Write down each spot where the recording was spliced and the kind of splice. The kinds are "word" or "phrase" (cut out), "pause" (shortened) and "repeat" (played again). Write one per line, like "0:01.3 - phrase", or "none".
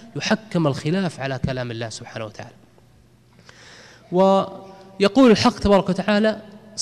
none